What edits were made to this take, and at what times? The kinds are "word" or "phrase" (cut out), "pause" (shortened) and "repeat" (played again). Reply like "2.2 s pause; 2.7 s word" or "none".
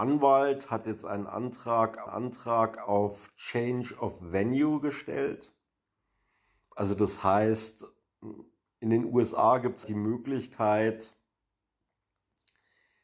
2.1 s repeat; 9.8 s word